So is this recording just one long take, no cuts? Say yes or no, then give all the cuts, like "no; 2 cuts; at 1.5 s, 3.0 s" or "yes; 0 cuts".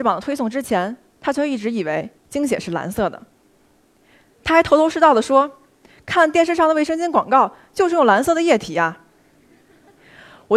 no; 1 cut; at 2.2 s